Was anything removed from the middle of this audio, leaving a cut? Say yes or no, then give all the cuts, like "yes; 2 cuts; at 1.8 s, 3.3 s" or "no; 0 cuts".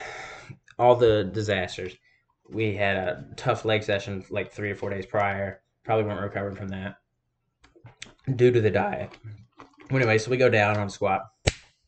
no; 0 cuts